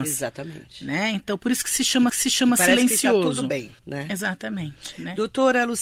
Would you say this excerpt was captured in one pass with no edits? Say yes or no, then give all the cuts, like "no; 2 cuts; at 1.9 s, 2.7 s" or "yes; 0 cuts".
no; 2 cuts; at 2.1 s, 3.8 s